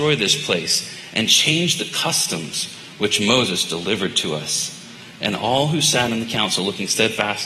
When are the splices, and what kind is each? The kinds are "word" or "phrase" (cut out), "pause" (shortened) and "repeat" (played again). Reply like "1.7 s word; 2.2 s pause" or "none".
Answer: none